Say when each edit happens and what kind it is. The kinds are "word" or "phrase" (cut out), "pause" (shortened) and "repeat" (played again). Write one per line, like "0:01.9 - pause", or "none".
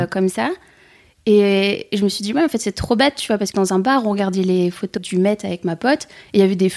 0:03.5 - phrase
0:05.0 - word